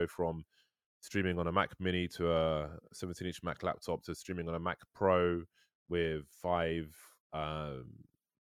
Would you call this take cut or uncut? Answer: cut